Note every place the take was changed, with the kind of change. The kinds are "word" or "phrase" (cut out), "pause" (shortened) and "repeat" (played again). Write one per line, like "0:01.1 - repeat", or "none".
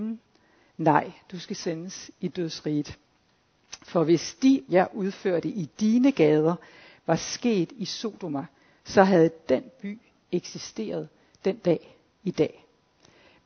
0:04.7 - word